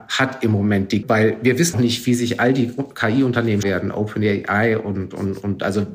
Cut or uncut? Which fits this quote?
cut